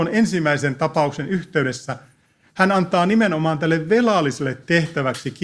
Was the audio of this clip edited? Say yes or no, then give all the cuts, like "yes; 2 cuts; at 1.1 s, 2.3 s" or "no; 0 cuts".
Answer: no; 0 cuts